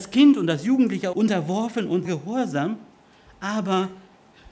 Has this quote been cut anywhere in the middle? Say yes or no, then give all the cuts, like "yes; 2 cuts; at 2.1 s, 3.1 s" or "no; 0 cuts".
yes; 2 cuts; at 1.1 s, 2.0 s